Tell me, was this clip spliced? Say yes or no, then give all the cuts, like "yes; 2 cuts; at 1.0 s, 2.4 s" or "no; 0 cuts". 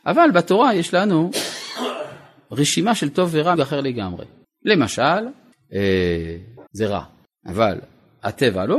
yes; 2 cuts; at 3.6 s, 6.7 s